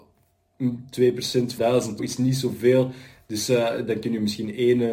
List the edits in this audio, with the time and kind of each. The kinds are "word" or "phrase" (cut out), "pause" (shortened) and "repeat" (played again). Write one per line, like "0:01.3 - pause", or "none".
0:01.6 - word
0:02.0 - word